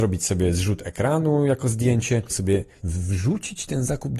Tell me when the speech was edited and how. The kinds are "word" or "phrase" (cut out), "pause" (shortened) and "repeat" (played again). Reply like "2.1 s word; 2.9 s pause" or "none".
2.3 s word; 2.8 s word